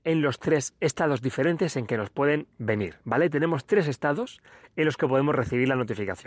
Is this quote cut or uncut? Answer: uncut